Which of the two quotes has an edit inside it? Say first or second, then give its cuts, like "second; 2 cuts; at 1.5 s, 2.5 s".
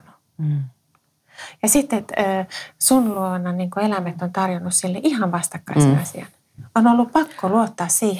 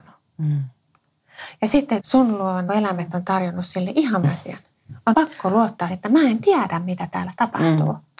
second; 5 cuts; at 2.0 s, 2.7 s, 4.2 s, 5.1 s, 5.9 s